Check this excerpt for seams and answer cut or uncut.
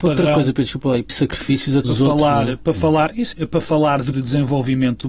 cut